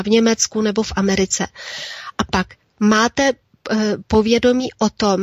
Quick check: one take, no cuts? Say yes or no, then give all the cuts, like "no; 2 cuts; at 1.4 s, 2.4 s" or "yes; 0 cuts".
yes; 0 cuts